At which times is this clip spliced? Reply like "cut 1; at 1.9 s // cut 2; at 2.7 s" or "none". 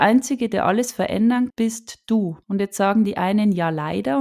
cut 1; at 1.5 s // cut 2; at 2.4 s